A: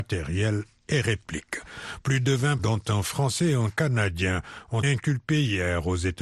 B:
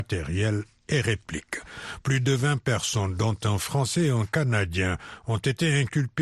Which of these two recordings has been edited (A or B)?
A